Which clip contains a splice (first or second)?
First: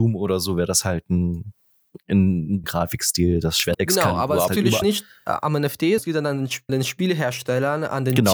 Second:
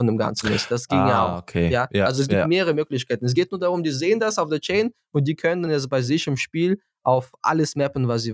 first